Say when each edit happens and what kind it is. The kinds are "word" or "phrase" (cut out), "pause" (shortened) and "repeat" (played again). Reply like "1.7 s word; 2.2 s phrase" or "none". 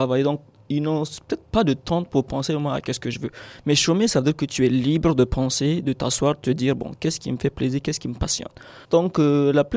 8.8 s pause